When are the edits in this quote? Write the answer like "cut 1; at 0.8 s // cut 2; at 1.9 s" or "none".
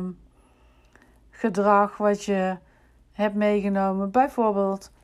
none

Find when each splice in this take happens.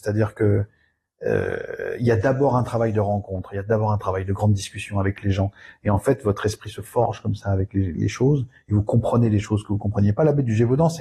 none

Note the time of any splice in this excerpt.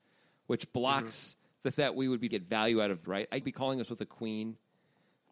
cut 1; at 1.7 s // cut 2; at 2.3 s // cut 3; at 3.0 s // cut 4; at 3.4 s

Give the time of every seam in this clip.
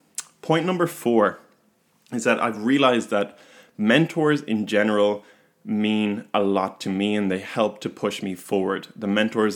none

